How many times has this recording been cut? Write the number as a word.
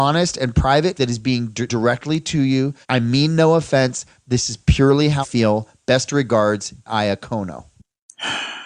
five